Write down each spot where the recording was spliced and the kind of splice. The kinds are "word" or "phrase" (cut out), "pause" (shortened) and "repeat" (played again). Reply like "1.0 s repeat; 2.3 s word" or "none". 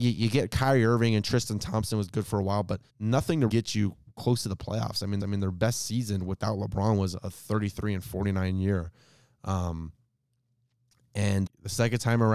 2.9 s pause; 3.5 s phrase; 5.2 s repeat; 11.5 s word